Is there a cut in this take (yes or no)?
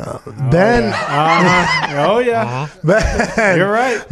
no